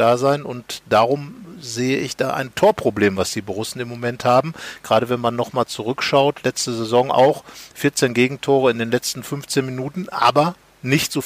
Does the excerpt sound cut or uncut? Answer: uncut